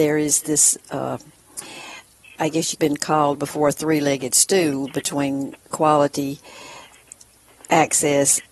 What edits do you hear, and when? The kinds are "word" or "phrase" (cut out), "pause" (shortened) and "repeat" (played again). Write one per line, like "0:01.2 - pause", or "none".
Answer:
0:02.4 - word
0:02.7 - phrase